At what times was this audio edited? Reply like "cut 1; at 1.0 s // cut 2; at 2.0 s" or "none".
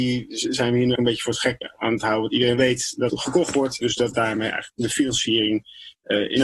cut 1; at 1.0 s // cut 2; at 3.1 s // cut 3; at 3.8 s